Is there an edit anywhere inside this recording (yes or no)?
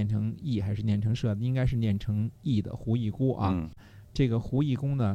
yes